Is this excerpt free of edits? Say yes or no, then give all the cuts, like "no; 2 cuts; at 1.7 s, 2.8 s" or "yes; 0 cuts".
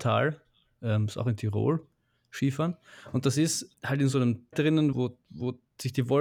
no; 3 cuts; at 3.7 s, 4.5 s, 4.9 s